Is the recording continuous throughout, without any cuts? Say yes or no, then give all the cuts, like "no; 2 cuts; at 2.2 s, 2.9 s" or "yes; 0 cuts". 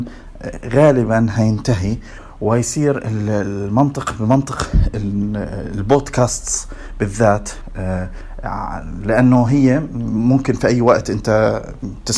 yes; 0 cuts